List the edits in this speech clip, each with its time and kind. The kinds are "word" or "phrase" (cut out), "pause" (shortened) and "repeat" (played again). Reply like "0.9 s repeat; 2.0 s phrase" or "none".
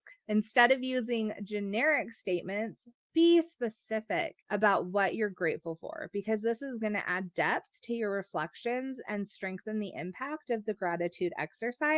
4.4 s pause